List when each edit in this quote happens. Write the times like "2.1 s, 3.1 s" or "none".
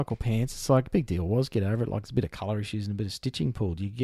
none